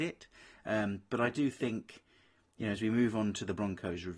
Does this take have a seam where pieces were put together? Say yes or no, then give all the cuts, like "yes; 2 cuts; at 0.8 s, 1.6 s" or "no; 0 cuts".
no; 0 cuts